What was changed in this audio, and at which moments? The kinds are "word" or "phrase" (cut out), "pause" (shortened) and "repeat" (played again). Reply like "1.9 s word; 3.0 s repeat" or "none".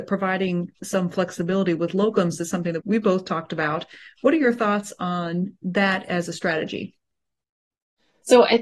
2.8 s word